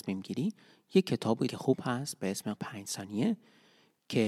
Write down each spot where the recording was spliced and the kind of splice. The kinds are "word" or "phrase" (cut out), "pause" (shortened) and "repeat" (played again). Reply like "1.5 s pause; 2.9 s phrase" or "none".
1.5 s word; 2.6 s word